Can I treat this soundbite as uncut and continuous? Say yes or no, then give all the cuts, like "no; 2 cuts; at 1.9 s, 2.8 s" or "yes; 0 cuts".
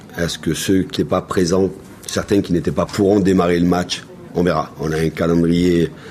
no; 3 cuts; at 1.0 s, 2.9 s, 4.3 s